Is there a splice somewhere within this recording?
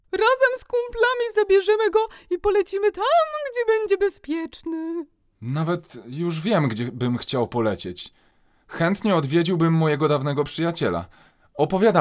no; 0 cuts

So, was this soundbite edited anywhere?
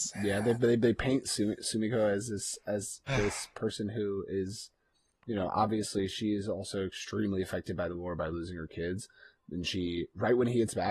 no; 0 cuts

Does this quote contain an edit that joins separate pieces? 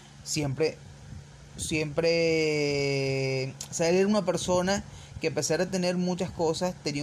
no; 0 cuts

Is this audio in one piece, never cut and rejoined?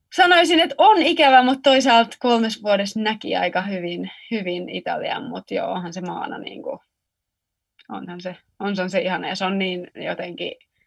yes; 0 cuts

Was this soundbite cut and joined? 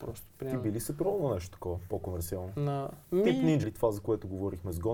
yes; 2 cuts; at 3.0 s, 3.6 s

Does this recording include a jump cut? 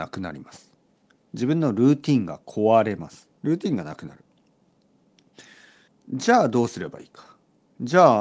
yes; 2 cuts; at 3.3 s, 5.9 s

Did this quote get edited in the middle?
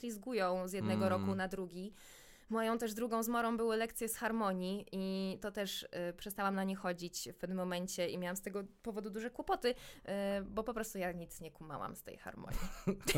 no; 0 cuts

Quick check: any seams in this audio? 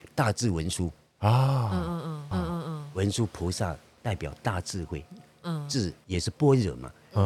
yes; 1 cut; at 2.3 s

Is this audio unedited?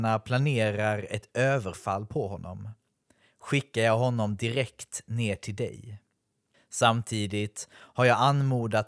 yes; 0 cuts

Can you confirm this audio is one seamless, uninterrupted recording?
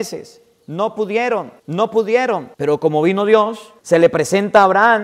no; 3 cuts; at 1.6 s, 2.5 s, 3.8 s

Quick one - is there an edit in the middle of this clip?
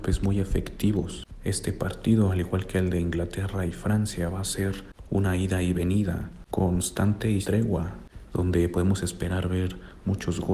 yes; 1 cut; at 7.4 s

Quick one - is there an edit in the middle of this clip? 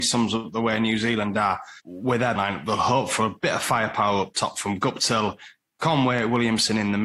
yes; 2 cuts; at 1.8 s, 2.4 s

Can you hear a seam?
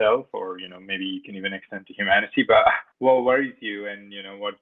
yes; 1 cut; at 2.9 s

